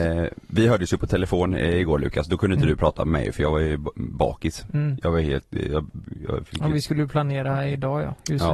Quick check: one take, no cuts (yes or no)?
yes